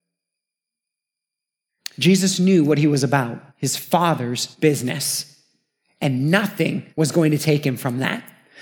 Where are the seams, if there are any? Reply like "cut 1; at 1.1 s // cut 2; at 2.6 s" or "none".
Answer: cut 1; at 3.5 s // cut 2; at 4.5 s // cut 3; at 6.9 s